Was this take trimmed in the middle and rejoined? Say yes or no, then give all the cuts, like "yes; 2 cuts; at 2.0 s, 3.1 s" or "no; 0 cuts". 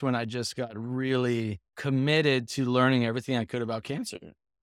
yes; 1 cut; at 1.7 s